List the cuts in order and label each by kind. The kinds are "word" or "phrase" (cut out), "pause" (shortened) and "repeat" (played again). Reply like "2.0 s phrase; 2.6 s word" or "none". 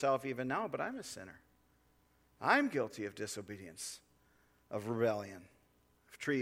none